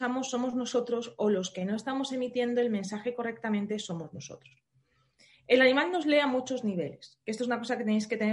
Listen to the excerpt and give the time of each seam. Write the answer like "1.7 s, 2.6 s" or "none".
none